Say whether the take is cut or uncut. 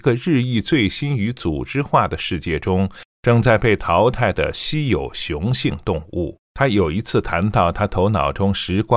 cut